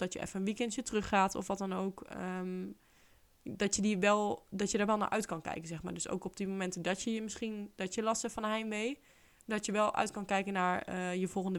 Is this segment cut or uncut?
uncut